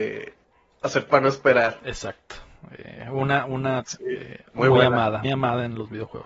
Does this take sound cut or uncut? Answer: cut